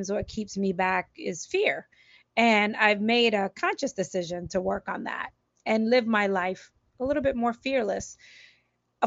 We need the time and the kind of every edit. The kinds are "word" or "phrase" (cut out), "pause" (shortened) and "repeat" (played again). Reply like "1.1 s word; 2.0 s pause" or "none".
none